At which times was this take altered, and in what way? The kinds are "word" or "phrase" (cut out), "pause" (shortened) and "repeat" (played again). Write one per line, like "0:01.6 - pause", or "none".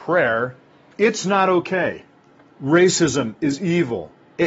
0:00.9 - word